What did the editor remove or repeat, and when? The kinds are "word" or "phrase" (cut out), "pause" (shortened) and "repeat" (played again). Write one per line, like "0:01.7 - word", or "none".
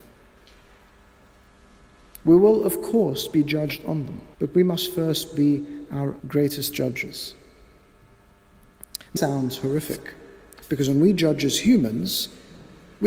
0:04.3 - pause
0:06.2 - word
0:09.2 - phrase